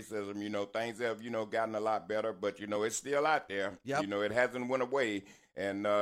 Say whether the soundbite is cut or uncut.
uncut